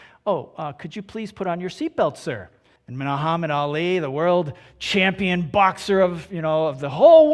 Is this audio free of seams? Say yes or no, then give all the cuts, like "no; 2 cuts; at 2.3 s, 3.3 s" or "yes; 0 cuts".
no; 1 cut; at 2.8 s